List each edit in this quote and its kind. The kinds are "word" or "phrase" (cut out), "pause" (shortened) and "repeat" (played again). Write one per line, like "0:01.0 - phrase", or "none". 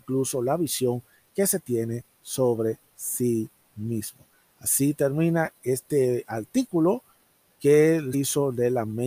0:08.1 - word